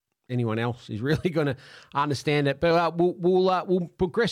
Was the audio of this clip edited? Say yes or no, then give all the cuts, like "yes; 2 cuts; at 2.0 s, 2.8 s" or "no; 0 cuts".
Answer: no; 0 cuts